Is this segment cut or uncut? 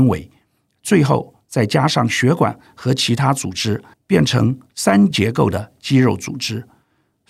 cut